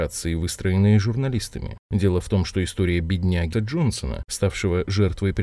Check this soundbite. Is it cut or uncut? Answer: cut